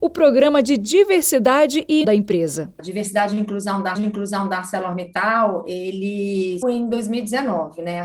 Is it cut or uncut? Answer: cut